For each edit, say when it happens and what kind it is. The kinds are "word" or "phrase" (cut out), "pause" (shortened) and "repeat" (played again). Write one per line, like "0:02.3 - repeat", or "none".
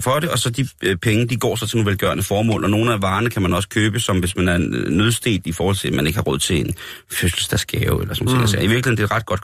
0:04.2 - word